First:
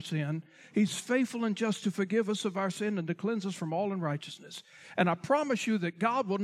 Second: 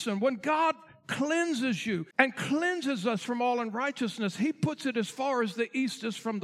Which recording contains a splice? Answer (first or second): second